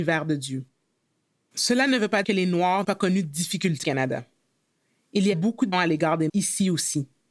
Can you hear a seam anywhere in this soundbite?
yes; 6 cuts; at 2.2 s, 2.8 s, 3.8 s, 5.3 s, 5.7 s, 6.3 s

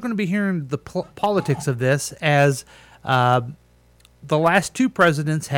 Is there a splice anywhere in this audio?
no; 0 cuts

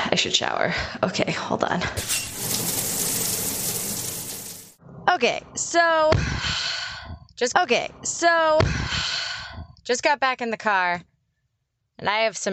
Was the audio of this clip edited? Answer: yes; 1 cut; at 7.5 s

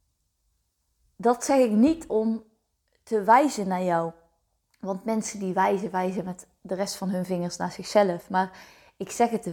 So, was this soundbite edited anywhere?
no; 0 cuts

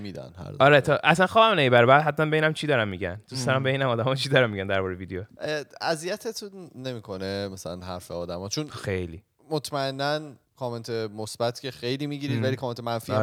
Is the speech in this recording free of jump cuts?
no; 1 cut; at 10.4 s

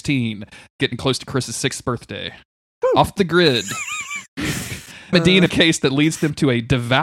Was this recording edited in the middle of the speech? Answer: yes; 3 cuts; at 3.2 s, 5.1 s, 5.5 s

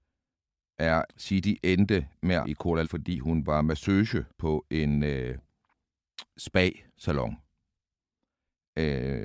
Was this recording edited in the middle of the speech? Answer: yes; 5 cuts; at 1.1 s, 2.4 s, 2.8 s, 4.3 s, 6.3 s

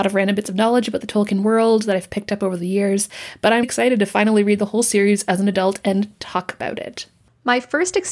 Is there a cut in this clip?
yes; 1 cut; at 3.6 s

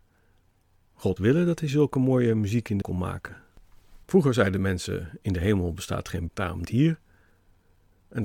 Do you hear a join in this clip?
yes; 5 cuts; at 1.2 s, 2.8 s, 4.0 s, 6.3 s, 6.6 s

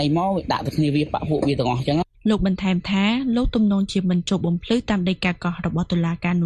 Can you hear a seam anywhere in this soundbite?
yes; 1 cut; at 2.1 s

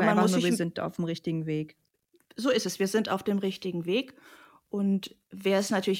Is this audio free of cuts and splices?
yes; 0 cuts

